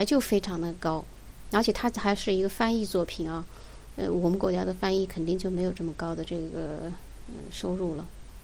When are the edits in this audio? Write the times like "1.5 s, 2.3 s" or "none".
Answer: none